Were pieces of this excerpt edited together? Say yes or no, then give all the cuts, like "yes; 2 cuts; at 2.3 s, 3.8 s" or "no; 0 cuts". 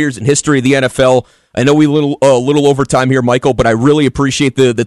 no; 0 cuts